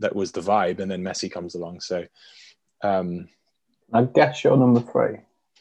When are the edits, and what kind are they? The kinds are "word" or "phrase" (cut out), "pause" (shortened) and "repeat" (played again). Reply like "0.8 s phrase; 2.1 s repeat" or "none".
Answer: none